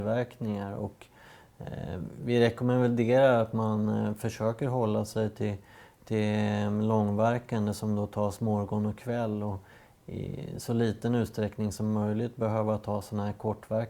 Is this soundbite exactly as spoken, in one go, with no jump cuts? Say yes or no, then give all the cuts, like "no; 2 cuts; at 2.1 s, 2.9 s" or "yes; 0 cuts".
yes; 0 cuts